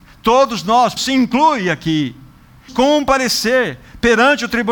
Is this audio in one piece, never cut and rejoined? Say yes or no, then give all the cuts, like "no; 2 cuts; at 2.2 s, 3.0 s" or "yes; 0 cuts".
no; 2 cuts; at 1.0 s, 2.7 s